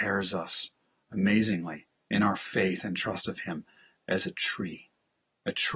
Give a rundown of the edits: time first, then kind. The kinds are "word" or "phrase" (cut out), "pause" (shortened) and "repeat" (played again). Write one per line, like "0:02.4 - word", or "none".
none